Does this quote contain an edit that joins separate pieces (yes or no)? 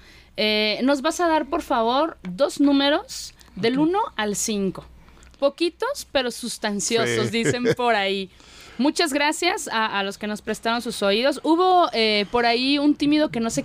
no